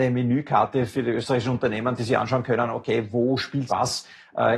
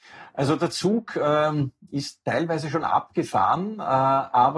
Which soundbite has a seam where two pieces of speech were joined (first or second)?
first